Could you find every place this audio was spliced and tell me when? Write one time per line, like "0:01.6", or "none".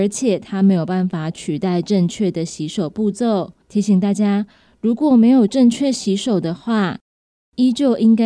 0:03.6